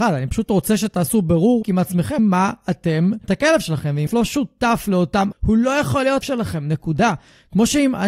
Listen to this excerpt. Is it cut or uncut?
cut